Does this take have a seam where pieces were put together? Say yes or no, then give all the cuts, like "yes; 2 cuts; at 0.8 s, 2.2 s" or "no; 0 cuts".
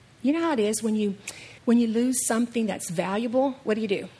yes; 1 cut; at 1.6 s